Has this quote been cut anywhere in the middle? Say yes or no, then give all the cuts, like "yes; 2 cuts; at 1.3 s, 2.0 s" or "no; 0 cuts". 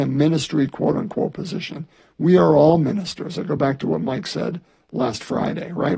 no; 0 cuts